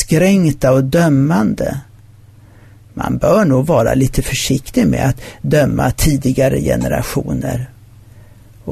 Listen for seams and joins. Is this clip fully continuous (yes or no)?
yes